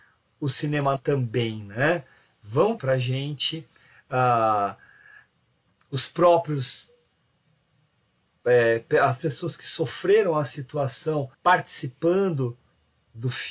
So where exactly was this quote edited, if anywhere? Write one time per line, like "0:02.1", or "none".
0:01.0
0:02.8
0:09.2
0:11.3